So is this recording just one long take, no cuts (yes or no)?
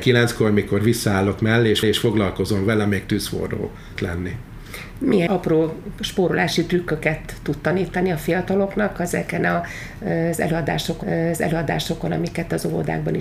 no